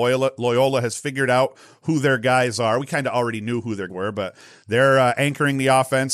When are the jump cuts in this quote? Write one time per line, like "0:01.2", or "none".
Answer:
0:03.9